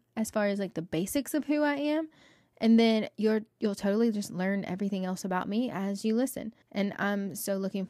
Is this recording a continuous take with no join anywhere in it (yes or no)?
no